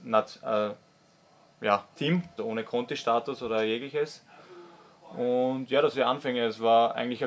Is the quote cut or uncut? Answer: cut